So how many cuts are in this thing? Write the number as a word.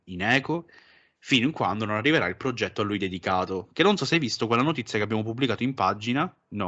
zero